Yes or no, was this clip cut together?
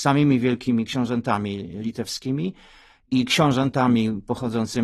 no